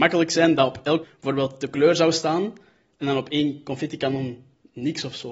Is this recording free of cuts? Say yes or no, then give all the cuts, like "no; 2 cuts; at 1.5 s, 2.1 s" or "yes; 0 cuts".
no; 1 cut; at 1.0 s